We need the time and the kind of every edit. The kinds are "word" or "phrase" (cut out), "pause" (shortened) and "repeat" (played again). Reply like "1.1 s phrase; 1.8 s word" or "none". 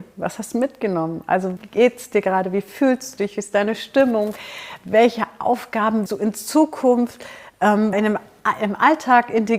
1.6 s word; 6.1 s word; 7.9 s word